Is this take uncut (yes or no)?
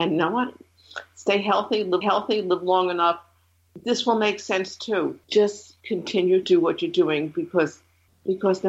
no